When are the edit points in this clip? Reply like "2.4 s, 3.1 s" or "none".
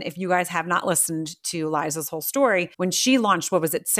2.7 s